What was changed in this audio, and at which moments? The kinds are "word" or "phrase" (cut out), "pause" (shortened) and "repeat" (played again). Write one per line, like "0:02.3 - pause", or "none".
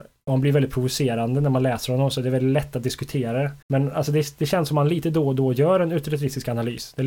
0:03.6 - pause